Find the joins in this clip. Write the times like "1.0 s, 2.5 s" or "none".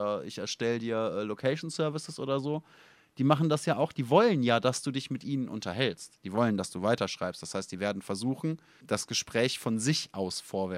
8.8 s